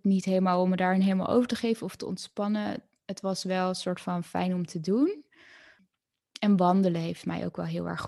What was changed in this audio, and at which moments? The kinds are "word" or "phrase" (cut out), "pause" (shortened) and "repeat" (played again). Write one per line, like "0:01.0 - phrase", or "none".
none